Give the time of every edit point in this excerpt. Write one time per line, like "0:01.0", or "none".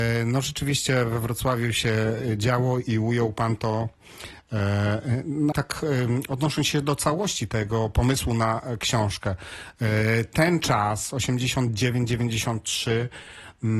0:05.5